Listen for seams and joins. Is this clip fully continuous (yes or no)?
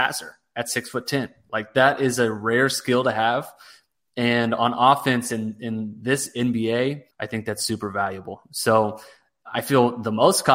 no